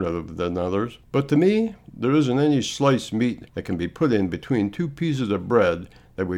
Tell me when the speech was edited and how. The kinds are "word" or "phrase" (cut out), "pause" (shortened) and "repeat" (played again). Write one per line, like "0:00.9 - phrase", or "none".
0:01.0 - pause
0:03.5 - pause

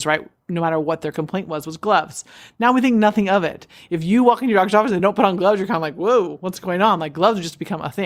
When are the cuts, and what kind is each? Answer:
none

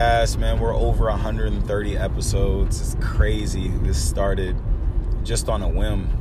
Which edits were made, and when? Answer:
none

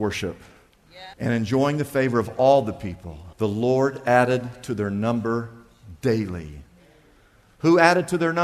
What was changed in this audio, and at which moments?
0:01.1 - pause
0:03.3 - pause

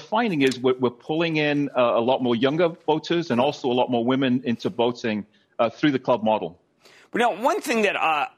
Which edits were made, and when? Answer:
none

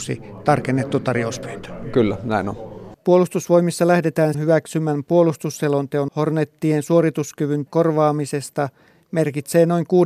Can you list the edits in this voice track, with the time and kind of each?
0:04.3 - phrase
0:06.1 - word
0:07.7 - word

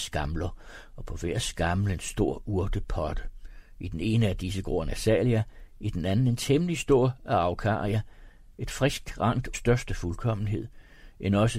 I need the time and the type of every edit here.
0:09.5 - phrase

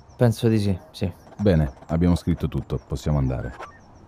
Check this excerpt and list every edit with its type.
none

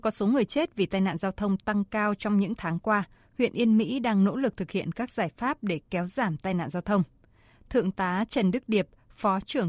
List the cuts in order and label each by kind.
none

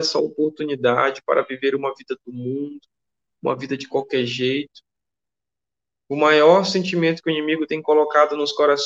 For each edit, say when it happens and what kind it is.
none

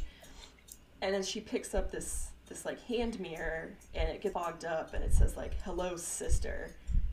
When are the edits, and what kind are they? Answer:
0:04.3 - word

